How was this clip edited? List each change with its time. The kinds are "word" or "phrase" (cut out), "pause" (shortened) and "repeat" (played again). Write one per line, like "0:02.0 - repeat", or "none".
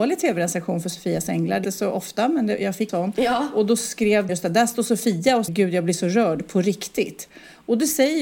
0:01.6 - word
0:02.9 - word
0:04.3 - word
0:05.5 - word

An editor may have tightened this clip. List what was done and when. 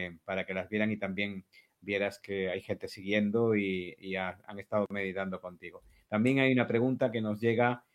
none

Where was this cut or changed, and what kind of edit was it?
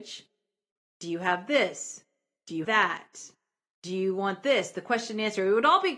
0:02.6 - word

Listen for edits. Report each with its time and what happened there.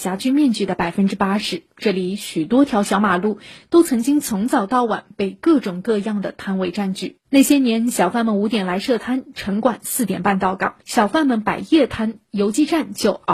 0:10.8 - pause

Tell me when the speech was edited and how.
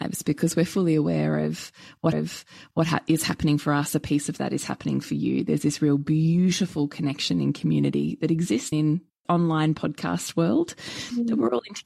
0:02.1 - repeat
0:08.7 - word
0:09.2 - word

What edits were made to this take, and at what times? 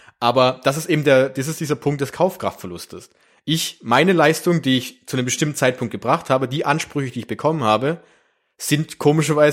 none

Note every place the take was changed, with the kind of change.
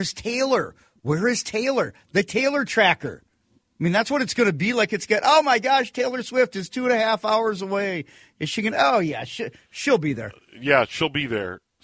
none

